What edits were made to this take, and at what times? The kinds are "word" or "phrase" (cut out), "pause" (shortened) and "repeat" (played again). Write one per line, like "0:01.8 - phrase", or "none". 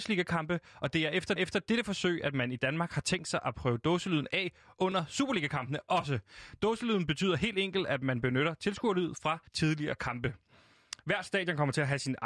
0:01.4 - repeat
0:09.5 - pause